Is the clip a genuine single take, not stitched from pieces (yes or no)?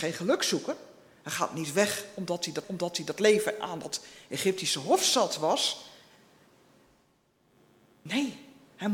no